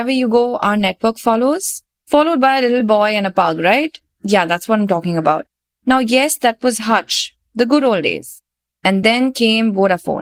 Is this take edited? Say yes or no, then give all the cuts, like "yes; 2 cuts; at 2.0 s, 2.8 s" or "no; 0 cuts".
no; 0 cuts